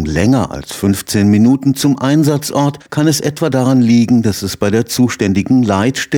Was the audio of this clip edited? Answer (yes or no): yes